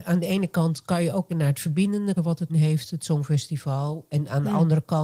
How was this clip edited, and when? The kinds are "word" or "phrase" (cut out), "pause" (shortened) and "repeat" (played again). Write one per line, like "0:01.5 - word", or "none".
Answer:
0:01.3 - word
0:02.2 - word
0:02.5 - word